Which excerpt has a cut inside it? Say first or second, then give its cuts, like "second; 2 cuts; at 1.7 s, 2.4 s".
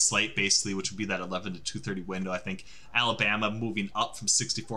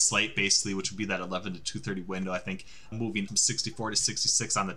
second; 2 cuts; at 2.9 s, 3.3 s